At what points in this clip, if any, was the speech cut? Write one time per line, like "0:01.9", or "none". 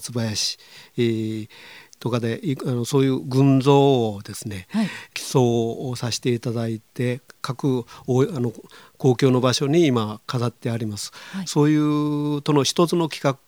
none